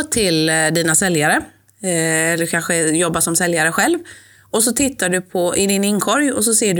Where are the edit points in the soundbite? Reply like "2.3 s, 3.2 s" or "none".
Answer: none